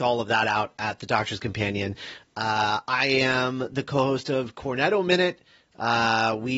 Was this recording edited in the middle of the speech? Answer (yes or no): no